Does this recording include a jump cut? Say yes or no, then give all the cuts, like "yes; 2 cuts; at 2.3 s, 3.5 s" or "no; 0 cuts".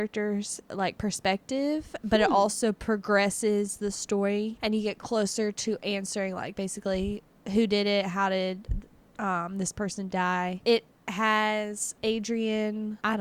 no; 0 cuts